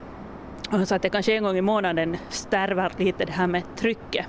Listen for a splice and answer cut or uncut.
uncut